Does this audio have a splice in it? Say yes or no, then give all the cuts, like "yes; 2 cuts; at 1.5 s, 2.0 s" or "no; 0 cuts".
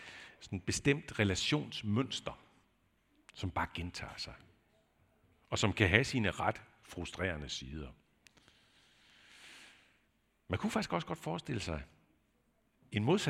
no; 0 cuts